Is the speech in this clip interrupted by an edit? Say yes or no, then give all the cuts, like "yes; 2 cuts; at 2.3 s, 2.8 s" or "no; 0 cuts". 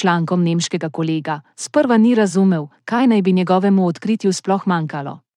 no; 0 cuts